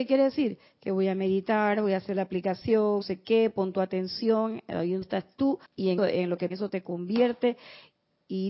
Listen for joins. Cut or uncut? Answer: cut